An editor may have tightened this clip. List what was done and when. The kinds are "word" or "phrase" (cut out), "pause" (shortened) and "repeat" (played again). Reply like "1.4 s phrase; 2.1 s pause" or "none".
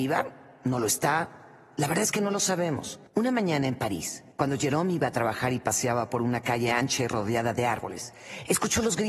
3.1 s pause; 4.3 s pause